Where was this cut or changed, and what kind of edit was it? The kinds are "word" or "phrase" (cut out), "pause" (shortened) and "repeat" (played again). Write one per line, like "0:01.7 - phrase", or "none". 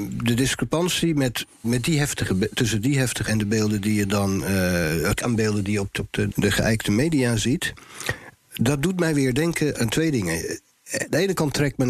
0:01.6 - word
0:03.3 - word
0:05.2 - word
0:06.0 - word
0:06.3 - word
0:09.7 - word